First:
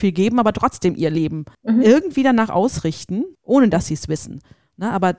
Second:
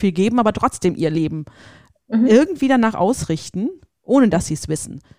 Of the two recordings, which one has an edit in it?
first; 2 cuts; at 1.5 s, 3.3 s

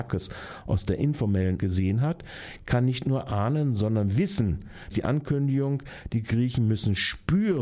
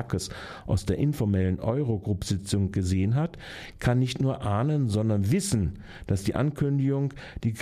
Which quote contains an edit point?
first; 2 cuts; at 1.6 s, 4.9 s

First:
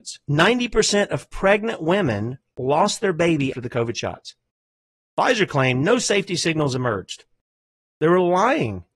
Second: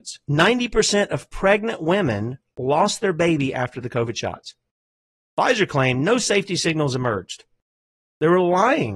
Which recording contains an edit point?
first; 1 cut; at 3.5 s

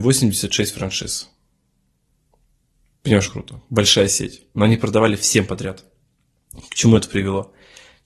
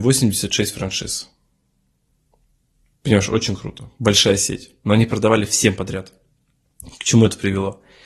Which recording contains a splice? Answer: first; 1 cut; at 3.3 s

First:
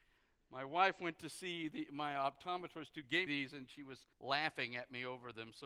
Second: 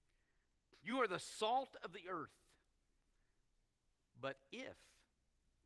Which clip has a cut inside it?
first; 2 cuts; at 3.3 s, 4.1 s

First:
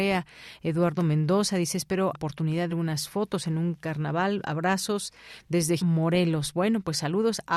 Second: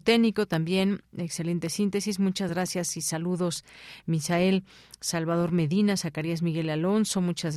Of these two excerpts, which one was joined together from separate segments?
first; 3 cuts; at 2.1 s, 2.7 s, 5.8 s

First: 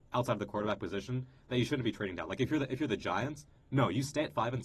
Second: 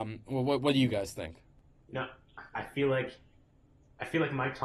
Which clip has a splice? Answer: second; 1 cut; at 2.5 s

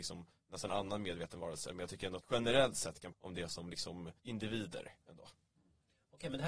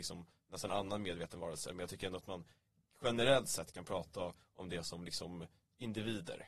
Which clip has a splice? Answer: first; 3 cuts; at 2.2 s, 3.1 s, 4.2 s

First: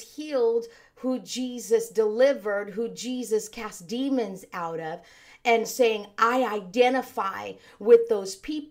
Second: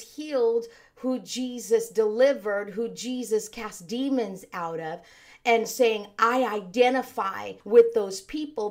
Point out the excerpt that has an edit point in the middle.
second; 1 cut; at 7.6 s

